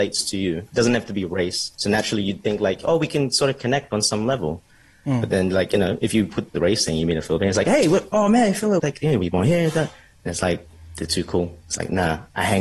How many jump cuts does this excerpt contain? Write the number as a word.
three